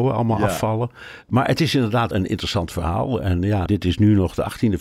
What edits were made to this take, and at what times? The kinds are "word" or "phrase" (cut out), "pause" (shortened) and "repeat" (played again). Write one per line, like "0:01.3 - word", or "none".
0:02.1 - word
0:03.7 - word